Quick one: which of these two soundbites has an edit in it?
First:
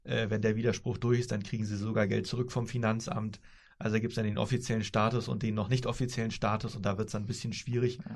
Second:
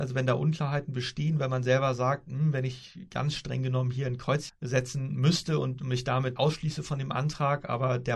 second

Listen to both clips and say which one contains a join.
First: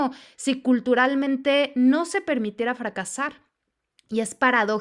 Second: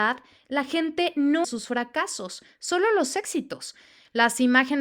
second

